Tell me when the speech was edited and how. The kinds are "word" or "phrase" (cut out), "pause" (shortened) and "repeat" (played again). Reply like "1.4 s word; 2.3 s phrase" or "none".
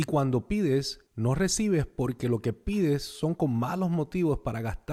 1.1 s pause